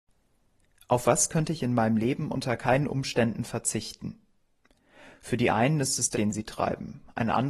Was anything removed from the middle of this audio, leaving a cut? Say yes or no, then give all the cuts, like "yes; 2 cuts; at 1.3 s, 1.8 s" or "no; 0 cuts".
yes; 1 cut; at 6.1 s